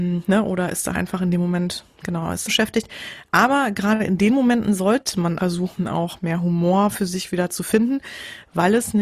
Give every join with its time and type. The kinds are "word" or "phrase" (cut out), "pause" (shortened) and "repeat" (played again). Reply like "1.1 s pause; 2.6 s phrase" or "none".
0.9 s word; 2.5 s phrase; 5.4 s word